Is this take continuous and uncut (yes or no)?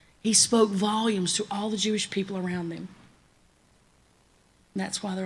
yes